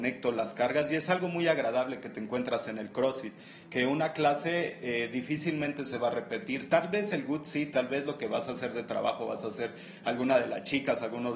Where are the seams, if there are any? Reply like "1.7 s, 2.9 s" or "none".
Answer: none